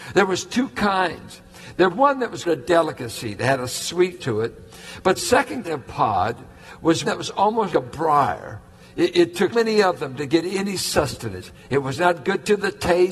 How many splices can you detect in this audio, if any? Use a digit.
8